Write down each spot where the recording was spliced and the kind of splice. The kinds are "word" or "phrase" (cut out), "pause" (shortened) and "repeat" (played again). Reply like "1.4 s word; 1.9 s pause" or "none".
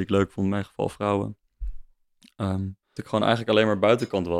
3.0 s word